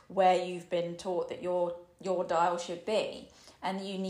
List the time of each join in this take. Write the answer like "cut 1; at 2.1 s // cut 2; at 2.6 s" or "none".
none